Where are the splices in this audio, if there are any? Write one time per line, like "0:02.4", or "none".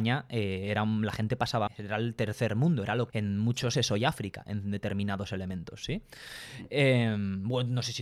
0:01.7
0:03.1
0:03.7